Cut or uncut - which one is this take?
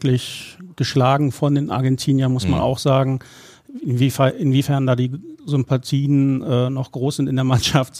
uncut